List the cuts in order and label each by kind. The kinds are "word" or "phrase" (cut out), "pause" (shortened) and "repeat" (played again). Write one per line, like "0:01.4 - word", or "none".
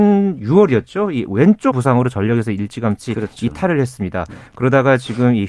0:01.7 - word

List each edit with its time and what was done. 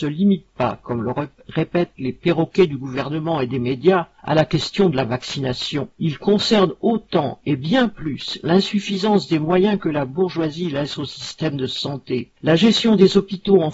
0:04.2 - pause
0:05.9 - pause
0:12.4 - pause

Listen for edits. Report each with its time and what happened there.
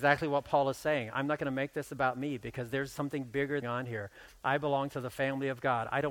0:03.6 - phrase

